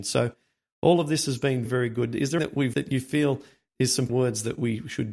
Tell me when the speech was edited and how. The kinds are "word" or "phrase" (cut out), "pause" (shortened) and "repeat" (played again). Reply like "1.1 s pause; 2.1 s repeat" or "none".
1.7 s word; 2.4 s word; 2.7 s word; 4.1 s word